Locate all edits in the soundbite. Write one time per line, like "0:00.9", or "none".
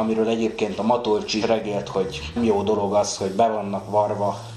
0:01.4
0:02.4